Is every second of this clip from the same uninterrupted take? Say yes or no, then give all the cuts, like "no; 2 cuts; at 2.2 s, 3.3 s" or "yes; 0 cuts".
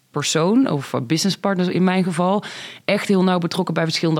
yes; 0 cuts